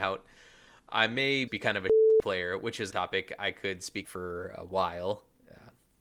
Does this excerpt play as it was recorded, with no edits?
no; 3 cuts; at 1.5 s, 2.9 s, 4.0 s

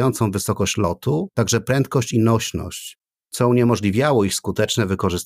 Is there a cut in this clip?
no; 0 cuts

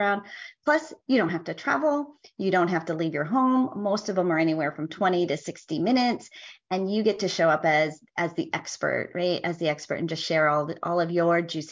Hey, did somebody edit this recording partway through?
no; 0 cuts

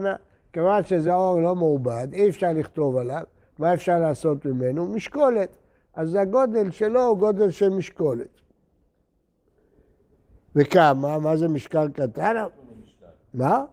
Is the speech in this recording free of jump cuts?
yes; 0 cuts

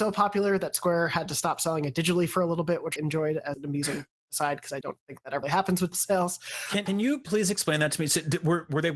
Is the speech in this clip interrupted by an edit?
yes; 6 cuts; at 3.0 s, 3.5 s, 4.8 s, 5.4 s, 5.9 s, 6.9 s

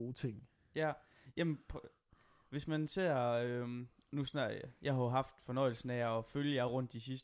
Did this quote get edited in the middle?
no; 0 cuts

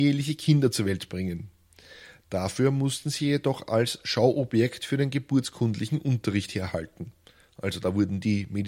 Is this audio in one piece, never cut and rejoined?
yes; 0 cuts

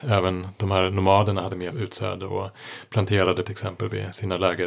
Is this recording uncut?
no; 2 cuts; at 1.7 s, 3.4 s

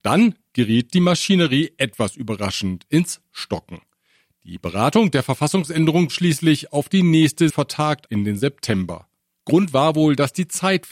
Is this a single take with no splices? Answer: no; 3 cuts; at 6.1 s, 7.5 s, 8.1 s

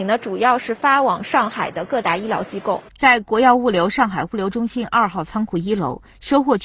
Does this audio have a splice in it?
yes; 1 cut; at 2.9 s

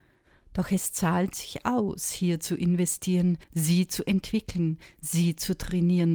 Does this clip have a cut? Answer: yes; 1 cut; at 3.4 s

